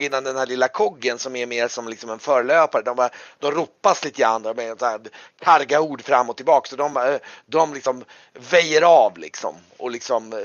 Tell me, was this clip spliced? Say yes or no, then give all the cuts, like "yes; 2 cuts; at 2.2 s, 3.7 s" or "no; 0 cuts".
no; 0 cuts